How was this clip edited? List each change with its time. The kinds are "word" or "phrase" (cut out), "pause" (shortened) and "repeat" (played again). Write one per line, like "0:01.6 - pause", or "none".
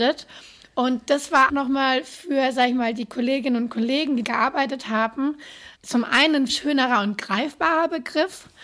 0:01.5 - word
0:04.2 - word
0:05.8 - pause
0:06.5 - word